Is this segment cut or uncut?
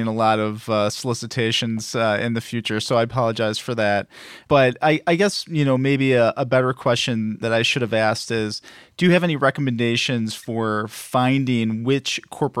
uncut